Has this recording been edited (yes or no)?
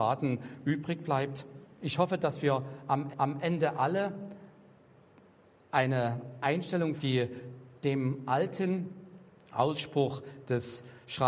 yes